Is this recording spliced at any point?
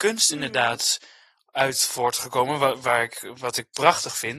no; 0 cuts

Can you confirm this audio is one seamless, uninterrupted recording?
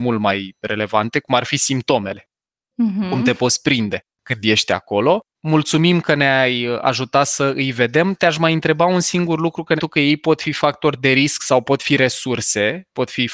no; 3 cuts; at 4.1 s, 5.3 s, 9.8 s

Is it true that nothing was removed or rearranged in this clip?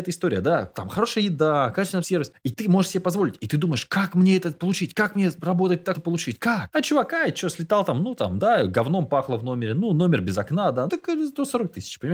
no; 3 cuts; at 2.0 s, 5.9 s, 10.9 s

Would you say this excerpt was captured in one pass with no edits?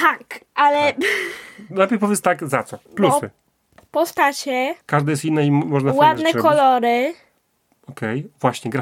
no; 2 cuts; at 2.9 s, 4.8 s

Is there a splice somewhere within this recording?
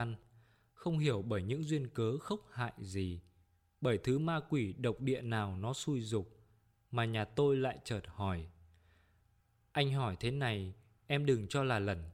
no; 0 cuts

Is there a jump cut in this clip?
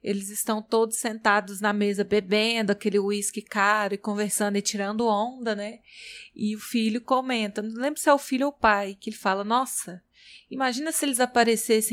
no; 0 cuts

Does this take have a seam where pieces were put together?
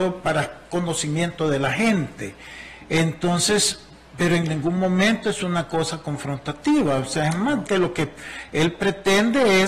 yes; 1 cut; at 7.7 s

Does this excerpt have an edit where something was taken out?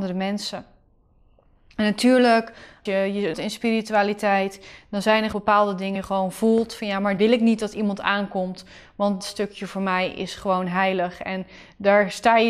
yes; 6 cuts; at 2.9 s, 3.3 s, 5.3 s, 6.0 s, 7.2 s, 9.2 s

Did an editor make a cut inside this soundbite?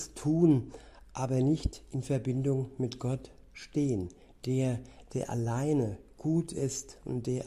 no; 0 cuts

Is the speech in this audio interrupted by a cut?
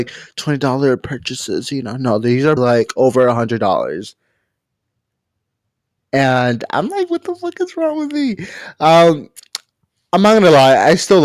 yes; 1 cut; at 2.6 s

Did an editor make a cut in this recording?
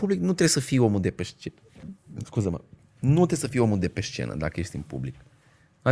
no; 0 cuts

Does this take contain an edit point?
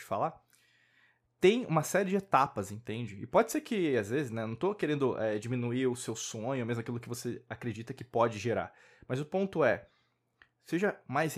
no; 0 cuts

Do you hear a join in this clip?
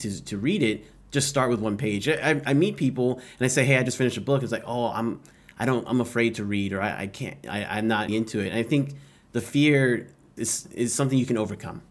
yes; 2 cuts; at 8.1 s, 10.4 s

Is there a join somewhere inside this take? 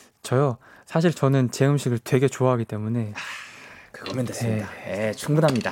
no; 0 cuts

